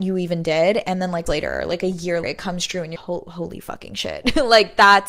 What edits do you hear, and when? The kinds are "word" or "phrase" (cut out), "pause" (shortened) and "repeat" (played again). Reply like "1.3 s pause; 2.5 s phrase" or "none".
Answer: 1.3 s word; 2.2 s word; 3.0 s word